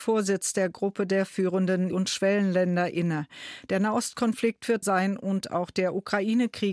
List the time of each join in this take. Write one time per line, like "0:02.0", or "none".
0:01.9
0:04.8